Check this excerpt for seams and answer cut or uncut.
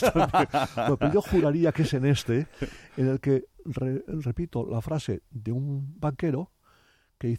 uncut